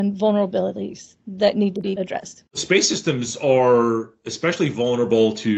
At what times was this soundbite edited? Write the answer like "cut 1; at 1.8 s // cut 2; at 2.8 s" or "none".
cut 1; at 2.5 s